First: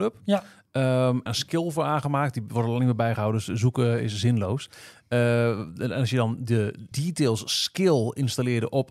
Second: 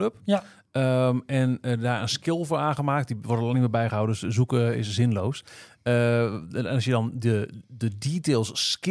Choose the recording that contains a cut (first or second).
first